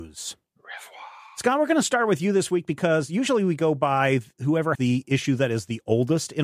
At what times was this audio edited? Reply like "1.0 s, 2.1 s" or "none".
4.7 s